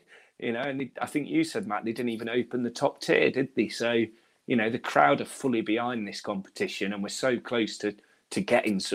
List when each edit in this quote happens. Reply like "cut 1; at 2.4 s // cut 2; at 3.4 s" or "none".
none

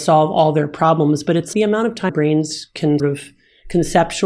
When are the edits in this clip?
cut 1; at 1.5 s // cut 2; at 2.1 s // cut 3; at 3.0 s

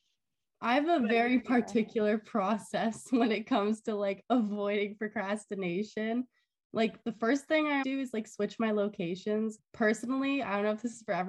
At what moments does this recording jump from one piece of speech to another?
cut 1; at 7.8 s // cut 2; at 9.6 s

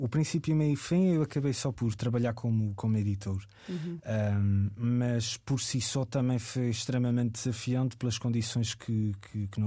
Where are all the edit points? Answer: cut 1; at 1.7 s

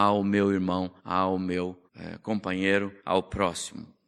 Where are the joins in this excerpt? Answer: cut 1; at 1.0 s // cut 2; at 1.9 s // cut 3; at 3.0 s

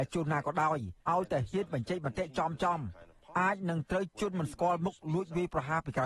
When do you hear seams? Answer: cut 1; at 1.0 s

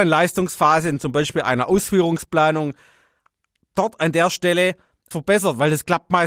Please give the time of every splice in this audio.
cut 1; at 5.1 s

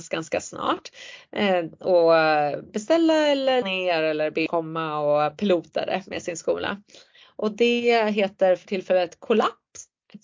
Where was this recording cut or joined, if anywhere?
cut 1; at 3.6 s // cut 2; at 4.5 s

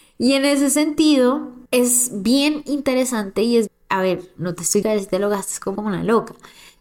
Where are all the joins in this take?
cut 1; at 1.7 s // cut 2; at 3.7 s // cut 3; at 4.4 s // cut 4; at 4.8 s // cut 5; at 5.8 s

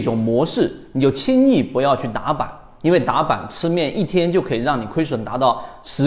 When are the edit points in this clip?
none

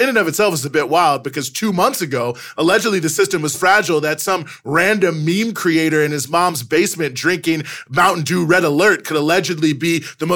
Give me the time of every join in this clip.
cut 1; at 3.5 s

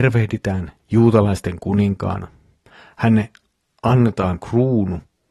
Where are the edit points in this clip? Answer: cut 1; at 4.4 s

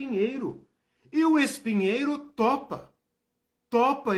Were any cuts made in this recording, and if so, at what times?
none

